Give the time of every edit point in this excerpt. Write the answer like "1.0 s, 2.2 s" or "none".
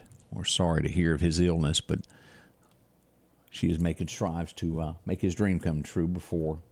none